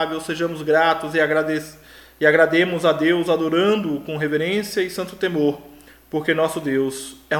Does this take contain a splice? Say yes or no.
no